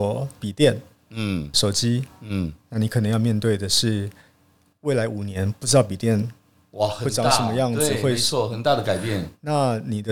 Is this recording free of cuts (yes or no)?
yes